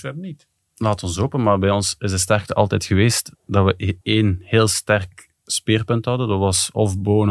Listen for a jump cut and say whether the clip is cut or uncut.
cut